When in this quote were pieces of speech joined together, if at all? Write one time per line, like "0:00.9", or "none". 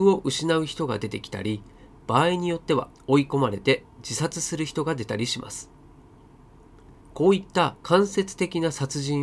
0:02.9
0:07.0
0:07.8